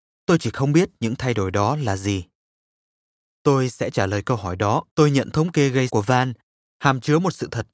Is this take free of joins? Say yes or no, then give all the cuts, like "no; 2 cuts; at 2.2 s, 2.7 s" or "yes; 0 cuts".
no; 3 cuts; at 4.9 s, 5.3 s, 5.9 s